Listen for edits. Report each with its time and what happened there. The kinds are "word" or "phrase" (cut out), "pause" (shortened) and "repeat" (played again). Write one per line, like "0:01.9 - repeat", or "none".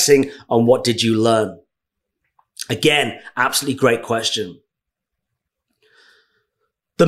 none